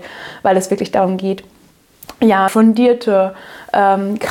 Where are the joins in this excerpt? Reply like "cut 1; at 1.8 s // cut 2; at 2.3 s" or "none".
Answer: cut 1; at 2.5 s